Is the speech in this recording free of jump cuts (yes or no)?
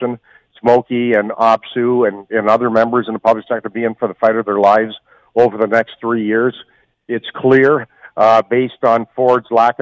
yes